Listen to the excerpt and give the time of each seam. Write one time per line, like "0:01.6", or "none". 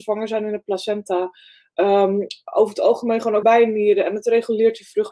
0:03.4